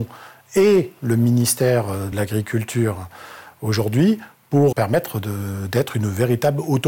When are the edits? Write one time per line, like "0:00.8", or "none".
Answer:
0:02.1
0:04.7